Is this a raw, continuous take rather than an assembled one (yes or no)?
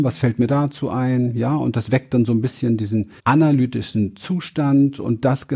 no